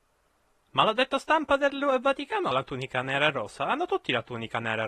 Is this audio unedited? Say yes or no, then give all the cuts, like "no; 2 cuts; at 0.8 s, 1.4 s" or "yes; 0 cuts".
no; 1 cut; at 2.5 s